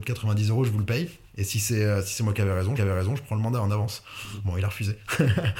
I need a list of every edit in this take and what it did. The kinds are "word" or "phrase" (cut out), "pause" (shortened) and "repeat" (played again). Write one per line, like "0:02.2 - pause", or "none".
0:02.8 - repeat